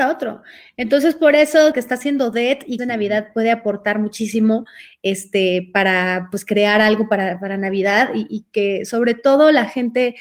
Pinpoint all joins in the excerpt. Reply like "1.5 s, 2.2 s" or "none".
1.7 s, 2.8 s

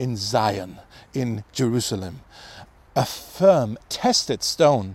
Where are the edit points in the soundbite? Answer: 3.8 s

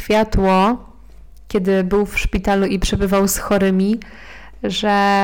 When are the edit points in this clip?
none

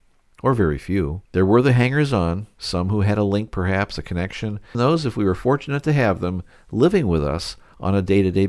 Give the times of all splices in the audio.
1.2 s, 4.7 s

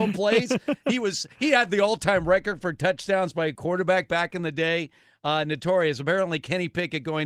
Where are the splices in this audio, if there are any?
none

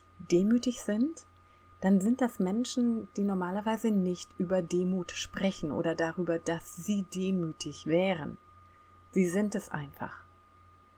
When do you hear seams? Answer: none

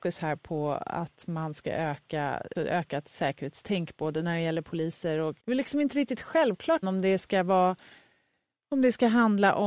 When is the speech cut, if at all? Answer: 2.5 s, 5.4 s, 6.8 s

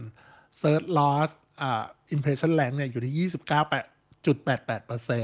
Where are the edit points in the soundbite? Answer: none

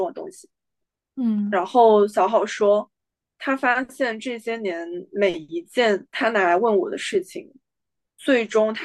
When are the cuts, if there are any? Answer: 6.1 s

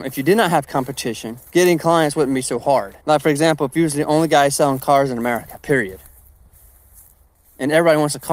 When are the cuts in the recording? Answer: 1.5 s, 3.0 s

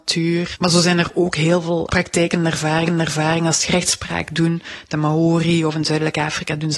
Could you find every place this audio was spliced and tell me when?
1.9 s, 2.9 s, 3.7 s

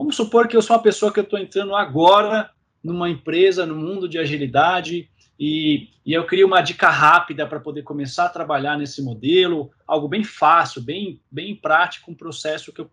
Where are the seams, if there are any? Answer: none

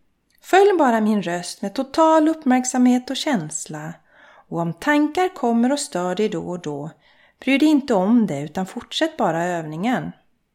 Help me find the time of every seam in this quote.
none

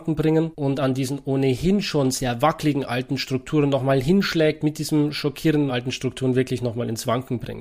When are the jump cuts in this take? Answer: 5.7 s

